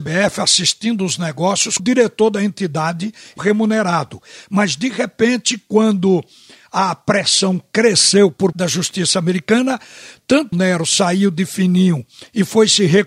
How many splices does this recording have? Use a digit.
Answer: 4